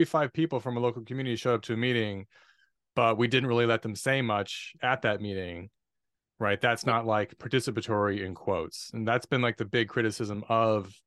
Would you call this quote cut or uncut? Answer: uncut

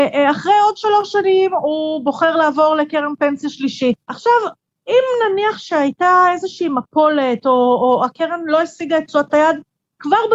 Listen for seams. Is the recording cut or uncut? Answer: cut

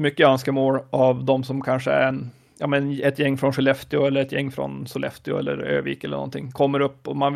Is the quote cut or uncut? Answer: uncut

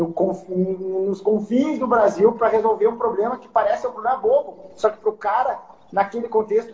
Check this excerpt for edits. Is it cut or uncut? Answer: uncut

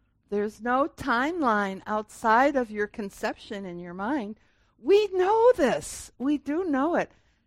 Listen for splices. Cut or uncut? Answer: uncut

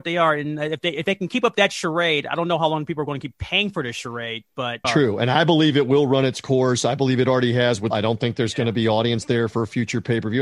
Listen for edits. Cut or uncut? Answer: cut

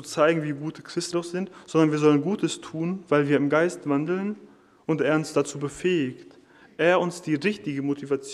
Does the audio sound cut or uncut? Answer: cut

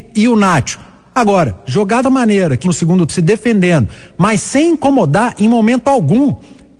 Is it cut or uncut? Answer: cut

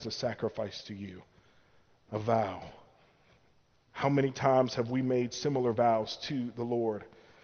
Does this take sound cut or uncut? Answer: uncut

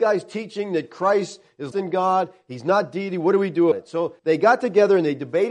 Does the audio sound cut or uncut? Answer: cut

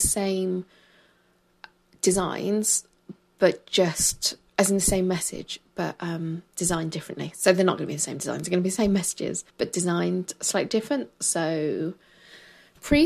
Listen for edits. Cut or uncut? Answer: cut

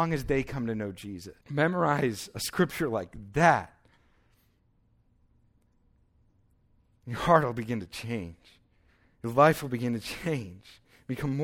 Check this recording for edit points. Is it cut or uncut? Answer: cut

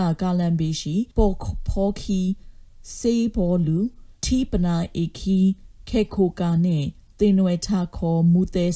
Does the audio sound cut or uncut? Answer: cut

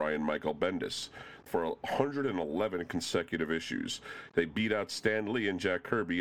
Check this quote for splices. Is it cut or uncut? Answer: cut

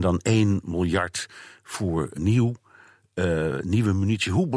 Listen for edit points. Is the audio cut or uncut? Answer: cut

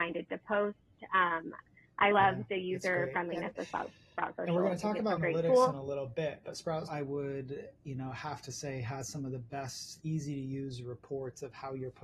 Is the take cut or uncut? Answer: cut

